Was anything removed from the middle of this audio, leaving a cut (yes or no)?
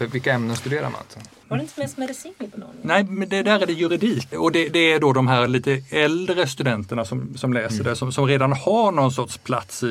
no